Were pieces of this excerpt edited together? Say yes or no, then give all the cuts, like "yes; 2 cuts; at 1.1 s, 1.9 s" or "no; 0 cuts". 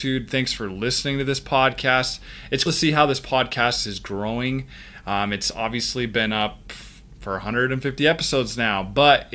yes; 1 cut; at 2.7 s